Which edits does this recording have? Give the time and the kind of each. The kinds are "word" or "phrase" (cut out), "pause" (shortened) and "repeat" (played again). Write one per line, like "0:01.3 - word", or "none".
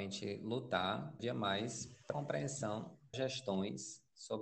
0:01.2 - word
0:02.1 - word
0:03.1 - word